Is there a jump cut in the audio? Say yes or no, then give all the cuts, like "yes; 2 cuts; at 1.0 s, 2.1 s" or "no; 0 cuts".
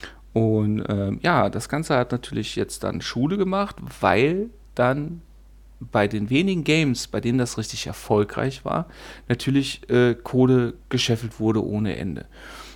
no; 0 cuts